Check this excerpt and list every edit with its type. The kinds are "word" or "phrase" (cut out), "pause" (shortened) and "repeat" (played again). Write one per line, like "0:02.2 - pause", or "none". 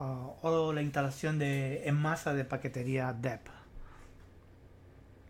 none

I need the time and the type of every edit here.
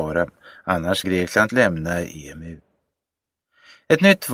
0:01.0 - word
0:01.5 - word

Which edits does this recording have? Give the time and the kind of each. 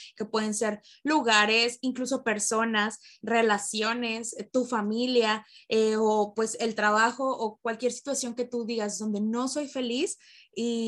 none

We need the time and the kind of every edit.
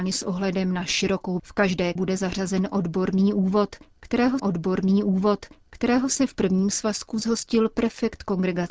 0:01.4 - word
0:02.0 - word
0:04.4 - repeat

